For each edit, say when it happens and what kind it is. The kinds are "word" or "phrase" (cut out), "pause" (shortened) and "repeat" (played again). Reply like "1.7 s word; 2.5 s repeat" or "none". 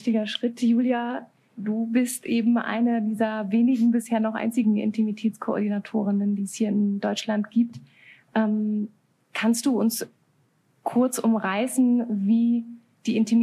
none